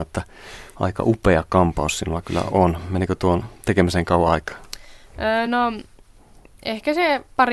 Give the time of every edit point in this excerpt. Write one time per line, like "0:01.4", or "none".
none